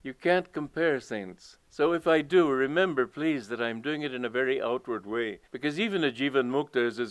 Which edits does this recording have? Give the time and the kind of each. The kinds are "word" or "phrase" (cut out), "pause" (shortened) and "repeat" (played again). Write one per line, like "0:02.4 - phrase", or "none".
0:01.6 - pause
0:05.4 - pause